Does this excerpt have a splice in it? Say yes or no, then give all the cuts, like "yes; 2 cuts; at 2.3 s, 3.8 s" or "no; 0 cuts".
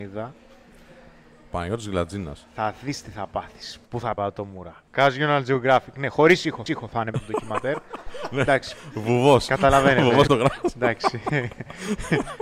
yes; 5 cuts; at 4.2 s, 4.9 s, 6.7 s, 7.1 s, 10.3 s